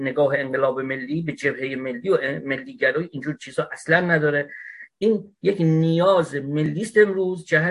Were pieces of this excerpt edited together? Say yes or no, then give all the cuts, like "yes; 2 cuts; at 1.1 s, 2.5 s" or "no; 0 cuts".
no; 0 cuts